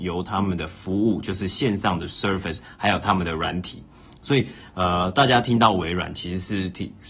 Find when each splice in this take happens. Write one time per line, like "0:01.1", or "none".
none